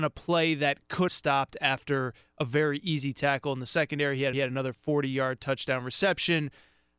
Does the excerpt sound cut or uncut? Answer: cut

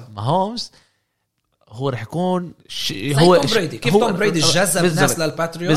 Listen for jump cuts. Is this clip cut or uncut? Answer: cut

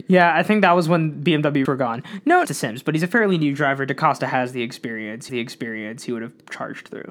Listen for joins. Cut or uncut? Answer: cut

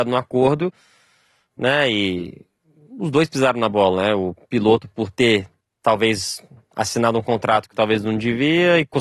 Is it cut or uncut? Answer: uncut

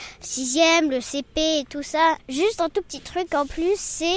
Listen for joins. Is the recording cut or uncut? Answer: uncut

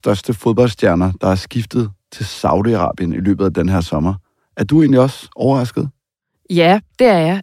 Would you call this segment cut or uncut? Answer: uncut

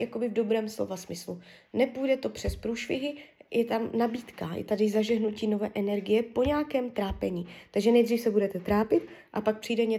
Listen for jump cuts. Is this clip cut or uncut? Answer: uncut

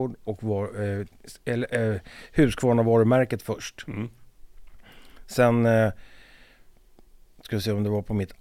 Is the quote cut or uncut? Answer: uncut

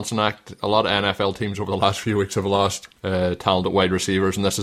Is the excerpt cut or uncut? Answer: cut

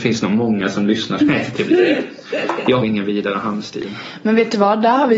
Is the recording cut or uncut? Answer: cut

